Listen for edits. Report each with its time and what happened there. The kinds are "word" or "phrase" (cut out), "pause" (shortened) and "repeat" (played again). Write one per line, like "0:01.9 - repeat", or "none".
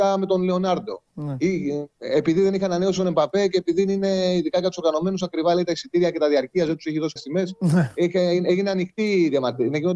0:07.2 - word